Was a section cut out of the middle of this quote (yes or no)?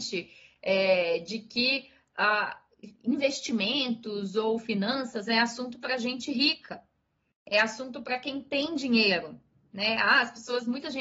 no